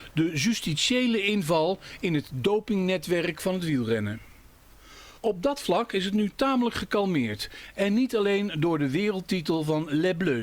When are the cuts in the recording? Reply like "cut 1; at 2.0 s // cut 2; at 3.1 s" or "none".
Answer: cut 1; at 5.2 s